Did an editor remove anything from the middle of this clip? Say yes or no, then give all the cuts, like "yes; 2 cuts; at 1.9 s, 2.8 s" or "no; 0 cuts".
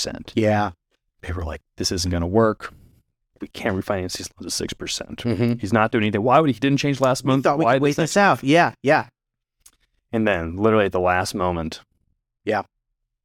no; 0 cuts